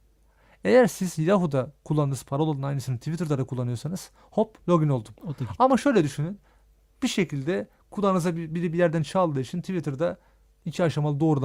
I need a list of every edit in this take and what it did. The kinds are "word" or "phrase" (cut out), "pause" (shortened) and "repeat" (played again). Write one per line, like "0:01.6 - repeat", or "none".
none